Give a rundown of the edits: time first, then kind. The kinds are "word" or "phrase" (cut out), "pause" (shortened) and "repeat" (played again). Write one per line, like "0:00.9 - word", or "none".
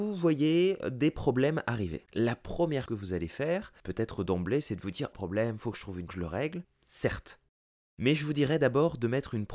0:02.1 - pause
0:02.9 - word
0:03.8 - pause
0:05.1 - phrase
0:06.1 - phrase